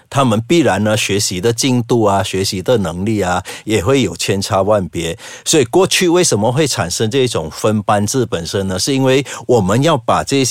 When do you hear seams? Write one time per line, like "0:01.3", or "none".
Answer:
none